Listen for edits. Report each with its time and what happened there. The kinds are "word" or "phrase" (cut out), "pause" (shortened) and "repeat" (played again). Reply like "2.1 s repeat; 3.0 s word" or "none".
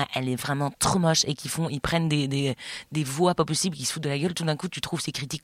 none